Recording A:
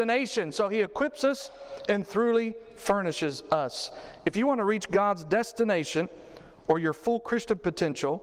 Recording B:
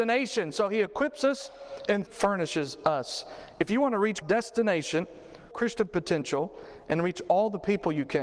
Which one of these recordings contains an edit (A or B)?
B